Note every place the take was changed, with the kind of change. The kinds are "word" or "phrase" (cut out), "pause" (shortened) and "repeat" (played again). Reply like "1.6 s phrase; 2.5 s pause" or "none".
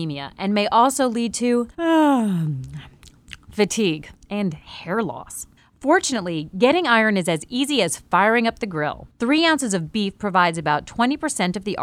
1.7 s pause; 4.1 s pause; 5.6 s pause; 9.1 s pause